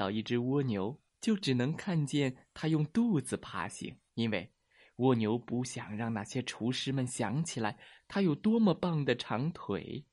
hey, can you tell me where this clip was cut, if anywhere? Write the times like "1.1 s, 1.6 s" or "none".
1.1 s, 4.1 s